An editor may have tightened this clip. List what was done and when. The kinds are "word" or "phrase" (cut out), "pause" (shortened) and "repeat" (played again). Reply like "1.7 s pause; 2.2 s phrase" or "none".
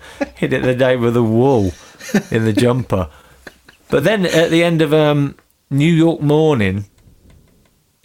none